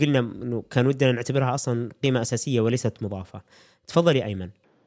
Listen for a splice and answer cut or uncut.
uncut